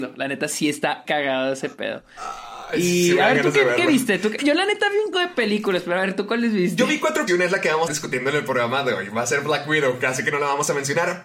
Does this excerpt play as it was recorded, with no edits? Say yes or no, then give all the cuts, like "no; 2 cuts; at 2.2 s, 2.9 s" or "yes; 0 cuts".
no; 5 cuts; at 1.1 s, 4.4 s, 5.1 s, 7.3 s, 7.9 s